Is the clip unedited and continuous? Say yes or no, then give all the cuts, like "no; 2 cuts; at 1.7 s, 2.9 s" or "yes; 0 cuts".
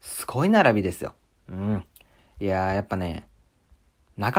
yes; 0 cuts